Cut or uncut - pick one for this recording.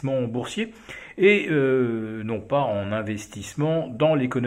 uncut